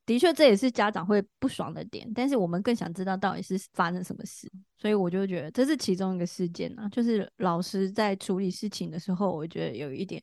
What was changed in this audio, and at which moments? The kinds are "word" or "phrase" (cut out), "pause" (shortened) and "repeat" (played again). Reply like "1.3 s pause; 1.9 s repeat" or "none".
3.7 s pause

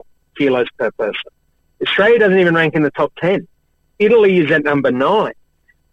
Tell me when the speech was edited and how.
none

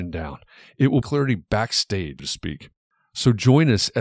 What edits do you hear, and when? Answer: 1.0 s phrase; 2.2 s word

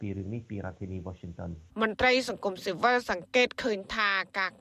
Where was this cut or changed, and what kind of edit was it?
1.7 s pause

